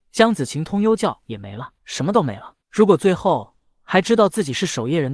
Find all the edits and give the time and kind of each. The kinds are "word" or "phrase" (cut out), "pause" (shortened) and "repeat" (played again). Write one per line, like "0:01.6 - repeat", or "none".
0:01.8 - pause
0:02.6 - pause